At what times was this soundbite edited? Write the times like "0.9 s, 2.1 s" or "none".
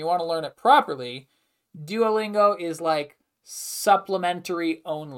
none